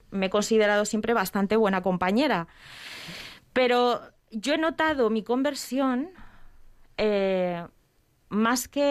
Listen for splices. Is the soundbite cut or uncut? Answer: uncut